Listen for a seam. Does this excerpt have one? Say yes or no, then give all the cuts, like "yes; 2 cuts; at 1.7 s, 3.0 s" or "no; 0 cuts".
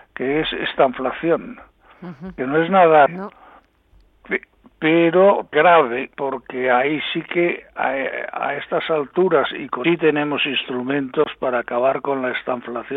yes; 4 cuts; at 3.1 s, 5.5 s, 6.1 s, 9.8 s